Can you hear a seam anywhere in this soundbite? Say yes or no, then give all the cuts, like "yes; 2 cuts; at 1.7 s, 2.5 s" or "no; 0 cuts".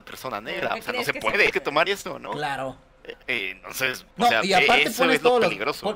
yes; 4 cuts; at 1.5 s, 1.9 s, 3.2 s, 4.1 s